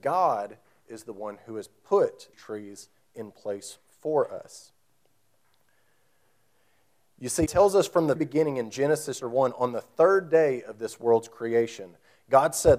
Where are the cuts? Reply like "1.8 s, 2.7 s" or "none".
2.3 s, 7.5 s, 8.2 s, 9.2 s

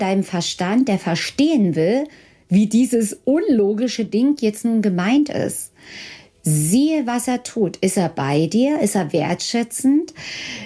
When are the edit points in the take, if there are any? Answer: none

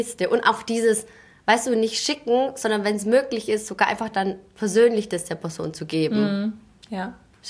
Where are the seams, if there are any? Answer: none

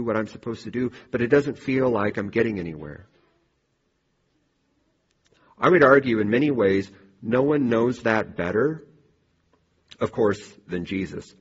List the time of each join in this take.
none

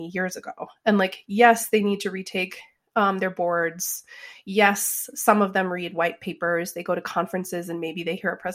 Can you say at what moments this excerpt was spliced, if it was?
none

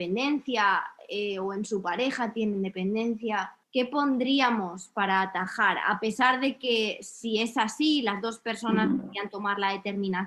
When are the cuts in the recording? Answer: 3.6 s

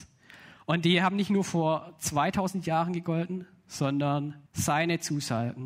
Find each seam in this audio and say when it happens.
4.5 s

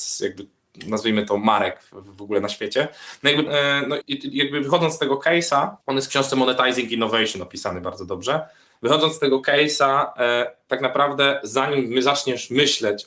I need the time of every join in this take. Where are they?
3.5 s, 4.0 s, 5.8 s

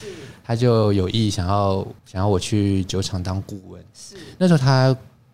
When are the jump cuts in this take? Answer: 2.0 s

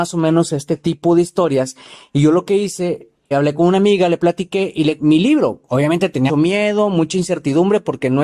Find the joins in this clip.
3.3 s, 5.0 s, 6.3 s

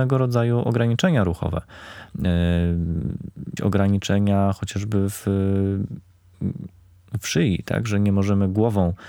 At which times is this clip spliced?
3.6 s

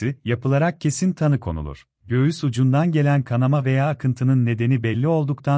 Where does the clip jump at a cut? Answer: 2.0 s

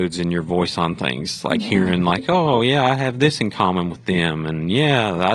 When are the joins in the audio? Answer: none

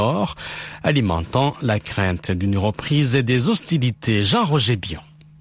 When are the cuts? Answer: none

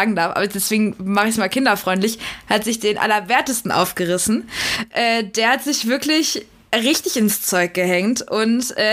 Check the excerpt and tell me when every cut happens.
none

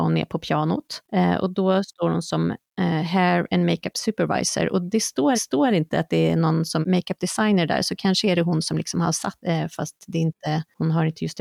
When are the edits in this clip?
5.3 s, 6.8 s, 9.4 s

